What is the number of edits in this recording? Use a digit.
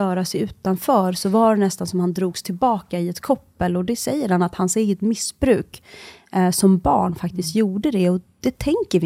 0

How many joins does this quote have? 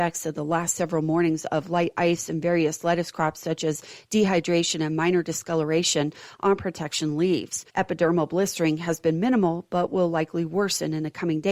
1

